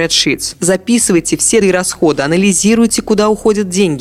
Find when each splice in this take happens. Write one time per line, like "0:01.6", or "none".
0:01.6